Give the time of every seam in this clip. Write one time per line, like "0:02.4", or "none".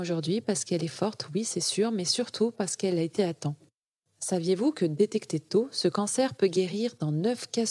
0:03.2